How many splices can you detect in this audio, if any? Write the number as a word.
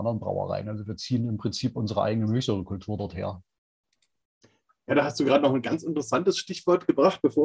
zero